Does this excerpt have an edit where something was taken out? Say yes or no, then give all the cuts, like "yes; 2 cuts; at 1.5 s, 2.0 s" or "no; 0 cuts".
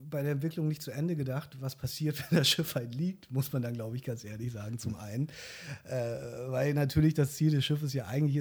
no; 0 cuts